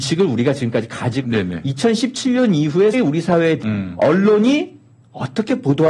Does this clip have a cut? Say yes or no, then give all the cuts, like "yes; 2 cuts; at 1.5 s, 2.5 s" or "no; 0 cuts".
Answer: yes; 3 cuts; at 1.2 s, 2.9 s, 3.6 s